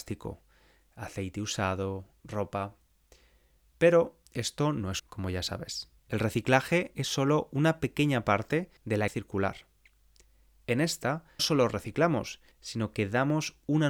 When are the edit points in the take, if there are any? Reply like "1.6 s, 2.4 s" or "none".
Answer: 4.3 s, 5.0 s, 6.0 s, 8.8 s, 9.1 s, 11.4 s, 12.5 s